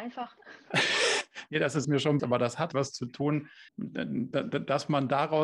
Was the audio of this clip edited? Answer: yes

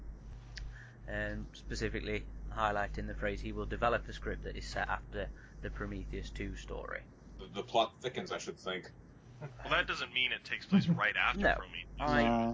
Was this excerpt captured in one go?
yes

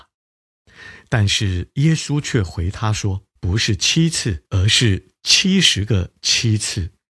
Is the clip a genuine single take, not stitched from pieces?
no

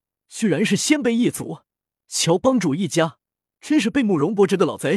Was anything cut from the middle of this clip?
no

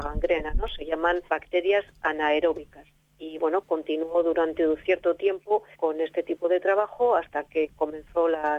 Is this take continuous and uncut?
no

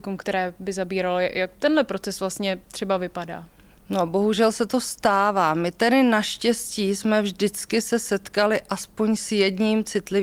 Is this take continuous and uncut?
yes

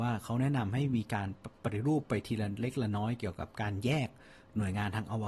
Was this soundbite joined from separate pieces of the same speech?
yes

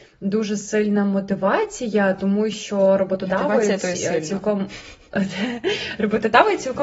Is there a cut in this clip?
no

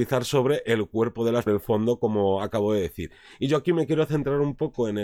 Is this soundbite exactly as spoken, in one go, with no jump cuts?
no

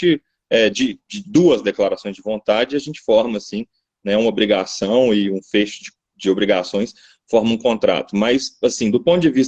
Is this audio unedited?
yes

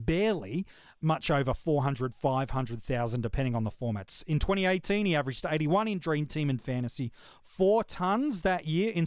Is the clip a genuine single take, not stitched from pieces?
yes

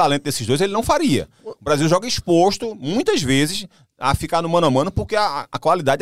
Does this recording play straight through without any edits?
yes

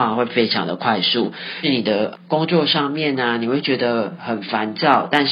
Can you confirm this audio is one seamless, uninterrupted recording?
yes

